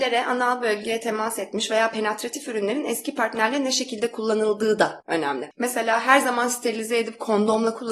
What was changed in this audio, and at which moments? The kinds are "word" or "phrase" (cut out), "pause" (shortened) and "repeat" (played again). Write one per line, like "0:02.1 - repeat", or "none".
none